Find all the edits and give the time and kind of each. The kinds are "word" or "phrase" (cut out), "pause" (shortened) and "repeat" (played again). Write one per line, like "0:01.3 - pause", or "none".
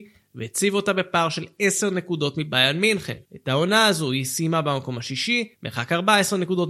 0:03.2 - pause
0:05.5 - pause